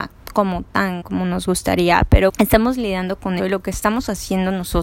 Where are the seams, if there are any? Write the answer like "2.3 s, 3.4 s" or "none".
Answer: 1.0 s, 2.3 s, 3.4 s